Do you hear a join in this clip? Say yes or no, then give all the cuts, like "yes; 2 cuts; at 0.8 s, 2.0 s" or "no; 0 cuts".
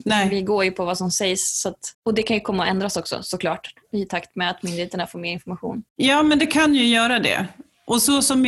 yes; 2 cuts; at 1.9 s, 5.9 s